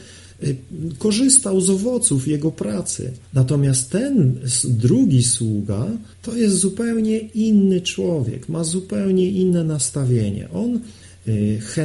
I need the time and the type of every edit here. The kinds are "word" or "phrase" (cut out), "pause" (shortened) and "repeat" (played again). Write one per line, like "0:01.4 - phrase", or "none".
0:03.2 - pause
0:06.1 - pause